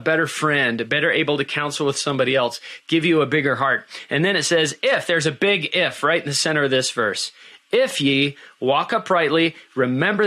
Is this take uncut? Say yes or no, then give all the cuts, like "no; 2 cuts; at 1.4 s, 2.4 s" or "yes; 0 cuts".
yes; 0 cuts